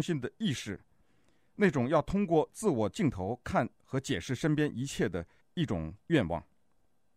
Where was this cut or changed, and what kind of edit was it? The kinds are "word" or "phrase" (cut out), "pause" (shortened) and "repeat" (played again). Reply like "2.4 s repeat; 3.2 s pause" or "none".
3.7 s pause; 5.4 s pause